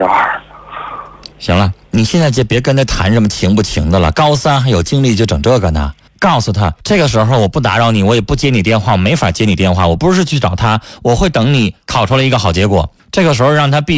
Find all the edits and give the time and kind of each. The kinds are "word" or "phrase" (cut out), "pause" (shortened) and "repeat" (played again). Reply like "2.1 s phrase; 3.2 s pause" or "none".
1.3 s pause; 1.8 s pause; 6.1 s pause; 6.8 s pause; 11.8 s pause; 13.0 s pause